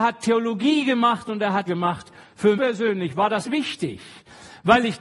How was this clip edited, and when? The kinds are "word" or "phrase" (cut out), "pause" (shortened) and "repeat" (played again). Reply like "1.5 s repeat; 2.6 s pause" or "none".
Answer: 1.7 s word; 2.5 s word; 3.4 s word